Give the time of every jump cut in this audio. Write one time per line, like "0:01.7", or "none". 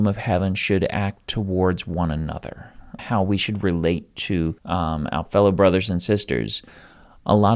0:03.0
0:04.6